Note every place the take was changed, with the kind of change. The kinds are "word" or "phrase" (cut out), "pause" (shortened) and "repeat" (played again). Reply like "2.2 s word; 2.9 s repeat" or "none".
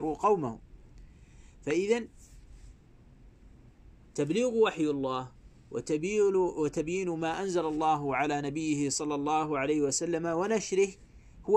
none